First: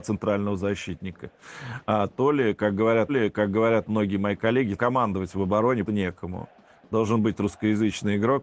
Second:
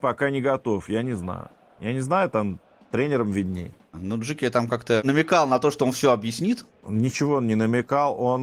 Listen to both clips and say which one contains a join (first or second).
first